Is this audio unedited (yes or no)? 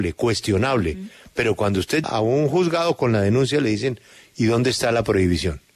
no